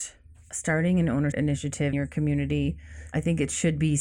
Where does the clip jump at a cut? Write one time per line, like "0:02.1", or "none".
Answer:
0:01.3
0:01.9